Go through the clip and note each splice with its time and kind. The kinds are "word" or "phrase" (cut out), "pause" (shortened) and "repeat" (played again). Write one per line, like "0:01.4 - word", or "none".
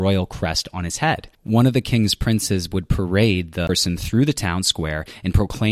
0:01.3 - pause

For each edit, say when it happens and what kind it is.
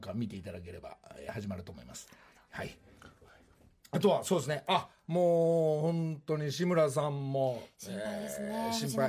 none

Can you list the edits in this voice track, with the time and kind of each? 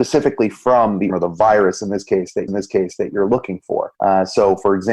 0:01.1 - word
0:02.5 - repeat
0:03.9 - pause

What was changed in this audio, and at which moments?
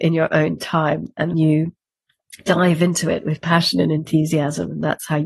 0:01.3 - word

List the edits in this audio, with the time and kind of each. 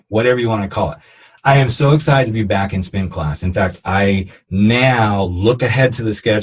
none

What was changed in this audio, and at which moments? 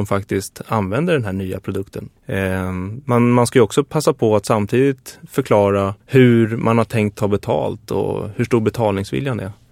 0:02.2 - pause
0:06.0 - pause

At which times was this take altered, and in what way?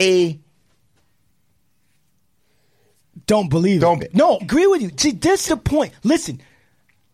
0:03.2 - pause
0:04.0 - word
0:04.4 - word
0:05.5 - word

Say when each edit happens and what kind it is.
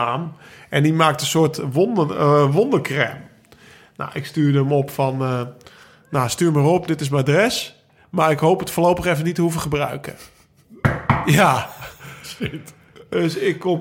none

